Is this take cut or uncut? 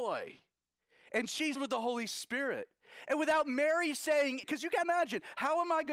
cut